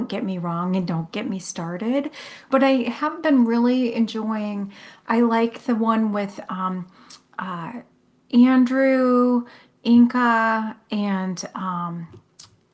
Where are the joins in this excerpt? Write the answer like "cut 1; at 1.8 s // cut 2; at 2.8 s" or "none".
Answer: none